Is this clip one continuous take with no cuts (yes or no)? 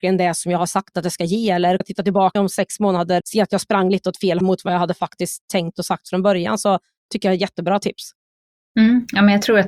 no